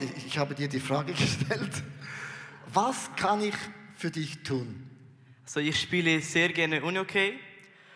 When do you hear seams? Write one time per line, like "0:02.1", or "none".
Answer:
none